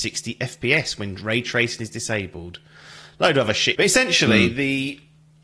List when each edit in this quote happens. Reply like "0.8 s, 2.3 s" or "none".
3.7 s